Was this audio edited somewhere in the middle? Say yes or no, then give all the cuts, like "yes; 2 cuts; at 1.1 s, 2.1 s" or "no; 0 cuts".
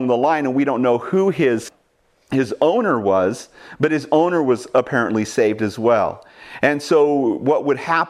no; 0 cuts